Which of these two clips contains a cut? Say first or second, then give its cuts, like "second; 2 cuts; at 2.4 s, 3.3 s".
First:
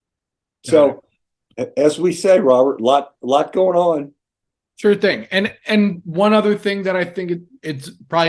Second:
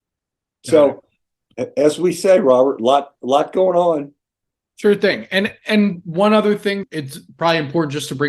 second; 1 cut; at 6.8 s